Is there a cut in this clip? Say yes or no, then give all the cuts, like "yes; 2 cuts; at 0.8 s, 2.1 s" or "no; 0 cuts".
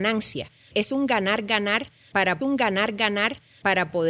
yes; 1 cut; at 2.4 s